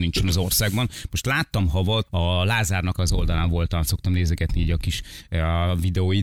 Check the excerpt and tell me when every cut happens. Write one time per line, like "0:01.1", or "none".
0:02.1
0:02.9
0:03.8